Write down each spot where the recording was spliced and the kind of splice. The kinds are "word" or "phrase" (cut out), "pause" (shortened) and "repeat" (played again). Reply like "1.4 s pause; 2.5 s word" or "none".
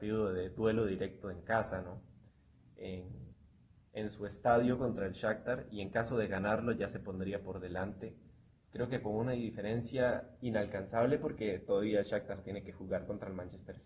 none